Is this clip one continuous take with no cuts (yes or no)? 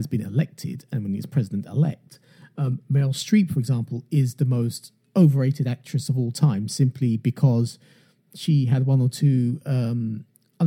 yes